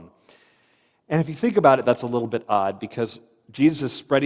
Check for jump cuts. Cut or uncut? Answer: uncut